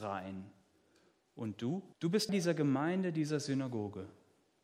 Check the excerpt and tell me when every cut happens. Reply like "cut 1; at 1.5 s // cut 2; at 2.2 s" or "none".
cut 1; at 1.9 s // cut 2; at 2.3 s

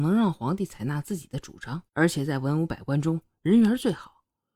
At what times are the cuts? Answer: cut 1; at 1.9 s

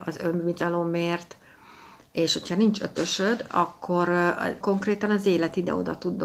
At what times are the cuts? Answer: cut 1; at 4.6 s

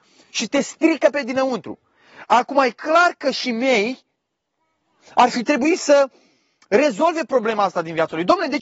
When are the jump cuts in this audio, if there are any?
none

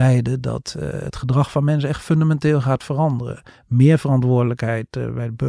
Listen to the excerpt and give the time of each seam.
none

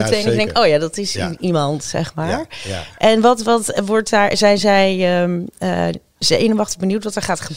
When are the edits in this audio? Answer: none

